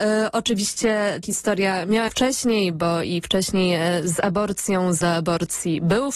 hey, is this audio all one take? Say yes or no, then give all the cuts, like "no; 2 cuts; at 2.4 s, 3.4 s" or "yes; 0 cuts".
no; 3 cuts; at 1.2 s, 2.1 s, 5.0 s